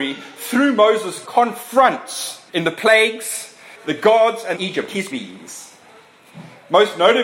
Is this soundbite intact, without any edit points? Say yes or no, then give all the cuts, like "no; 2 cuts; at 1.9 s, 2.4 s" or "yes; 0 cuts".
no; 5 cuts; at 1.2 s, 2.5 s, 3.8 s, 4.5 s, 5.1 s